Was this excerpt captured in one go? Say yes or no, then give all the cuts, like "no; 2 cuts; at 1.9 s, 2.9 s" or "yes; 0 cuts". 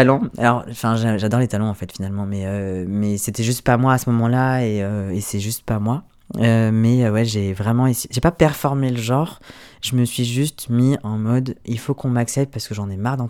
yes; 0 cuts